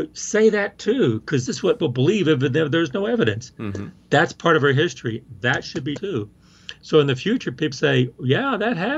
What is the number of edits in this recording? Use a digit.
4